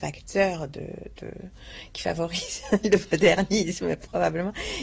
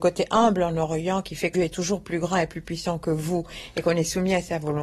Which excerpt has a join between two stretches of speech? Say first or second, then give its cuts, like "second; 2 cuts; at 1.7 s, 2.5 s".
second; 1 cut; at 1.5 s